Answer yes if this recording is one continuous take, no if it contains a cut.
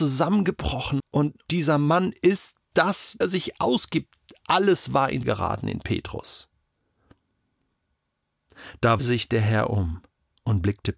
no